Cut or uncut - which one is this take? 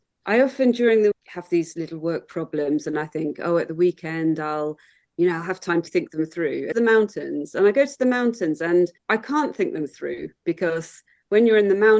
cut